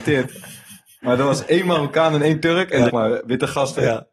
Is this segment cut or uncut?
cut